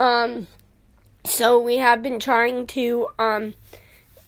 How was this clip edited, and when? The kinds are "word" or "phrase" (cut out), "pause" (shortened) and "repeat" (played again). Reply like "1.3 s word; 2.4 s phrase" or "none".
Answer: none